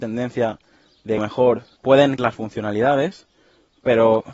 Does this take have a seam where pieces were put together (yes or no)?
yes